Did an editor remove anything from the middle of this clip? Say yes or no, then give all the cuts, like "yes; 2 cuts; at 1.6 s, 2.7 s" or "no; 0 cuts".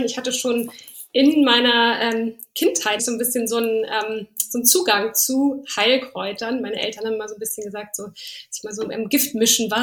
yes; 1 cut; at 3.0 s